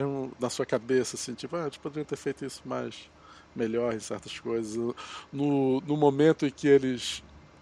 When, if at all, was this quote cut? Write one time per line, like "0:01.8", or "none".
none